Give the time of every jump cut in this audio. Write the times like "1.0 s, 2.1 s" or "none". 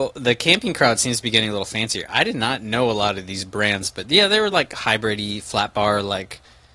none